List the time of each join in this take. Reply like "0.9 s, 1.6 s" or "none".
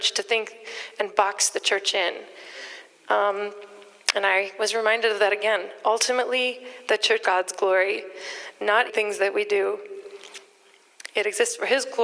7.2 s, 8.9 s